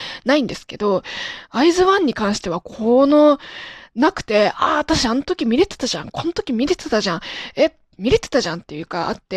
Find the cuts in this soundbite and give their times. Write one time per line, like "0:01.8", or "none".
none